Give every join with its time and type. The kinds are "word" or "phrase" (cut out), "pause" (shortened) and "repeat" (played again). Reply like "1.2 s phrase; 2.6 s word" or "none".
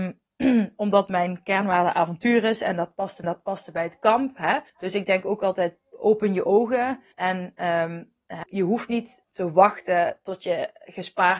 3.2 s repeat; 4.7 s pause; 7.1 s pause; 8.4 s word; 9.2 s word